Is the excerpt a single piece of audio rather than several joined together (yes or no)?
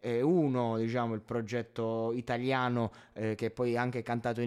yes